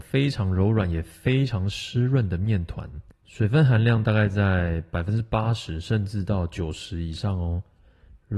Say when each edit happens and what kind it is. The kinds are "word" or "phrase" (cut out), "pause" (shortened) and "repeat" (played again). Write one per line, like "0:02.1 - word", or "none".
0:03.1 - pause